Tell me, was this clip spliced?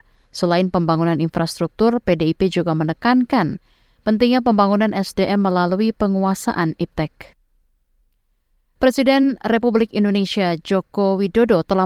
no; 0 cuts

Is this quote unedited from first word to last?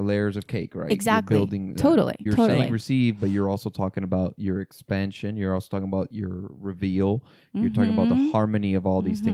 no; 1 cut; at 2.3 s

